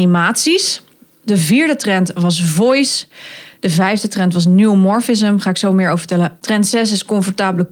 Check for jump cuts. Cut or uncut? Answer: uncut